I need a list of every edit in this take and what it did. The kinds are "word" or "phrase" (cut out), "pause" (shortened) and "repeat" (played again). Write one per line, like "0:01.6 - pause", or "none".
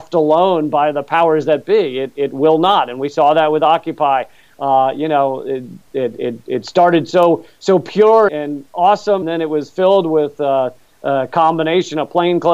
0:08.3 - word
0:09.2 - word